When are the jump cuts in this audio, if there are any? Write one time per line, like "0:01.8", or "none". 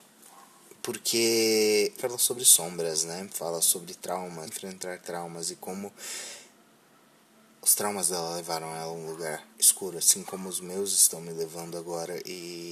0:02.0
0:04.5
0:09.5